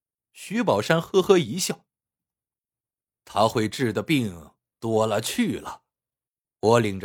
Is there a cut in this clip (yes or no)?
no